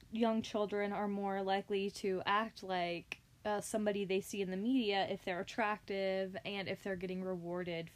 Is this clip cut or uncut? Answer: uncut